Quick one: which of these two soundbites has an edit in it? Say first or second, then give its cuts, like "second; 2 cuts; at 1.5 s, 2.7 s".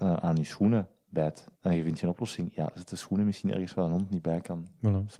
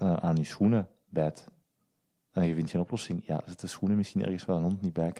first; 1 cut; at 1.5 s